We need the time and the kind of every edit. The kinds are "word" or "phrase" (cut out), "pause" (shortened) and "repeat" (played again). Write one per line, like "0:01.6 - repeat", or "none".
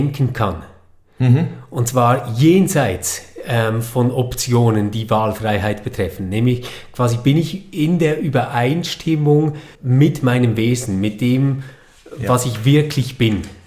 0:09.7 - pause